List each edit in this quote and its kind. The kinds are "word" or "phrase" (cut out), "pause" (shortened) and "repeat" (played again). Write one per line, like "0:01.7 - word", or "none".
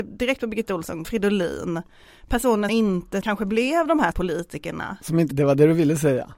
0:01.0 - word
0:02.7 - word
0:03.2 - word
0:04.1 - word
0:05.3 - word